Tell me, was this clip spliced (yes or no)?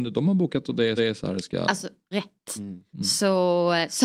yes